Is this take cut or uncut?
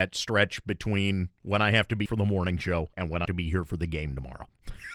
cut